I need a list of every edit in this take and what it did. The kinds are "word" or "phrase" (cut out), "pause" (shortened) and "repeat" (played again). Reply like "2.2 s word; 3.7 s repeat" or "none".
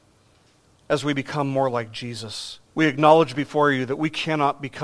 2.7 s pause